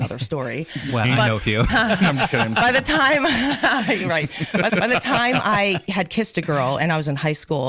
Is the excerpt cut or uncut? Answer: cut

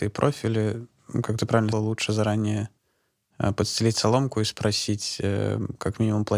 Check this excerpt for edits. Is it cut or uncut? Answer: cut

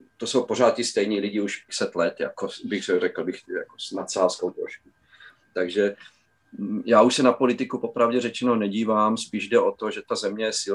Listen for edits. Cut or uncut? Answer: cut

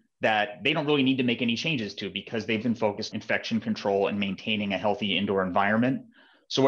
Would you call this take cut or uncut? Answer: cut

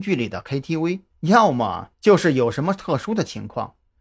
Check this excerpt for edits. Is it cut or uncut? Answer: cut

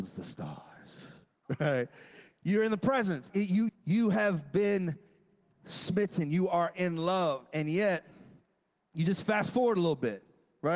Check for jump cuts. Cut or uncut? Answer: cut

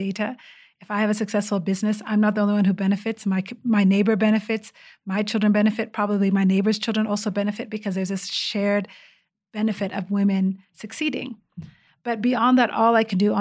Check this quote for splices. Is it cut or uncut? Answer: uncut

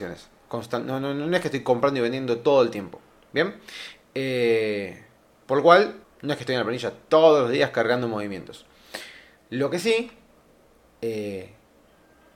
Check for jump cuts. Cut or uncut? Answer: cut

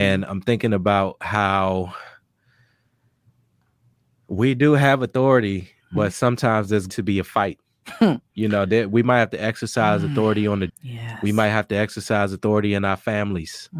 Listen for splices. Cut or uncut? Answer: cut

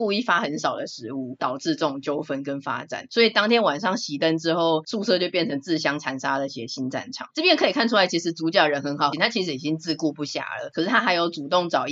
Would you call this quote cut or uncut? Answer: cut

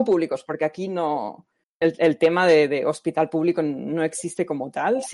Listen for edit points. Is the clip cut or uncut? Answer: cut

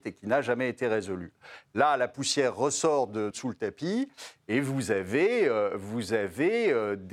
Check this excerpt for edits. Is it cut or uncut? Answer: cut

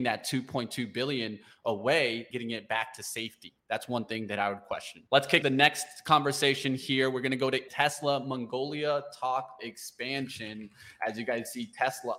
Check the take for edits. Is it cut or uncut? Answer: cut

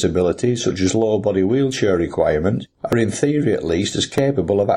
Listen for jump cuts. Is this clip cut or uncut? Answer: uncut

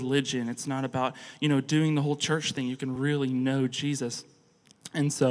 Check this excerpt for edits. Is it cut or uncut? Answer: uncut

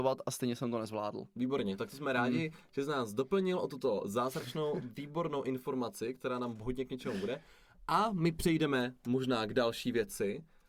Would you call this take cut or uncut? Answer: uncut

